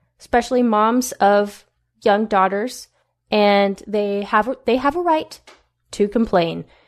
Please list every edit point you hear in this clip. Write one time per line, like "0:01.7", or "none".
none